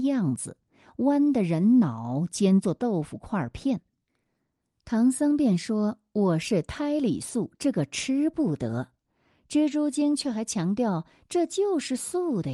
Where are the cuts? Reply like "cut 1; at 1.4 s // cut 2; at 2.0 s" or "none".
none